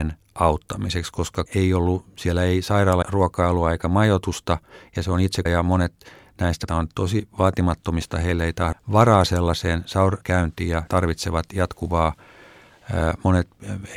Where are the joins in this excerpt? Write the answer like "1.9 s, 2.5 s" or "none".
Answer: 1.5 s, 3.0 s, 5.5 s, 6.7 s, 8.1 s, 8.7 s, 10.2 s, 10.9 s